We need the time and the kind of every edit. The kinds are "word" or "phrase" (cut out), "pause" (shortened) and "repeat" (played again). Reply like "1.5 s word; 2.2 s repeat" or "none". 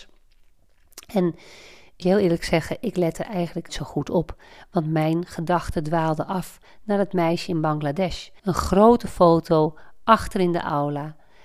2.0 s word; 3.7 s word; 8.4 s pause